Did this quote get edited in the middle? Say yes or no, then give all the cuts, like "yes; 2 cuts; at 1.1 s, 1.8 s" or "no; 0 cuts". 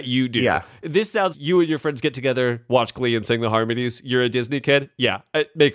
yes; 1 cut; at 1.3 s